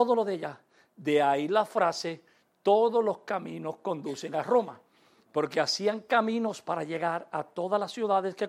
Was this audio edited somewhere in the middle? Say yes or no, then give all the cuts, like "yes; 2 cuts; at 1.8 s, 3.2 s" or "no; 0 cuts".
no; 0 cuts